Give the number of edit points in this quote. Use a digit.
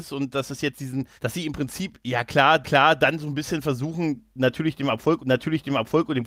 3